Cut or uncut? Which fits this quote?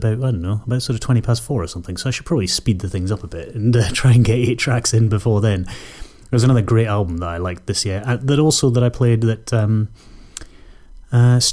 uncut